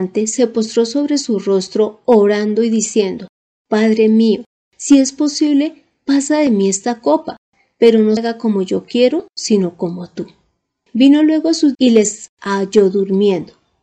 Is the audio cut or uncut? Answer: cut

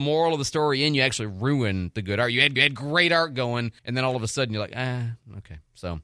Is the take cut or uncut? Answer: cut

